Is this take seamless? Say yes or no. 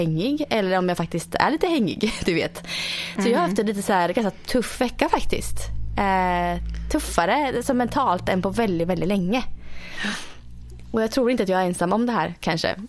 yes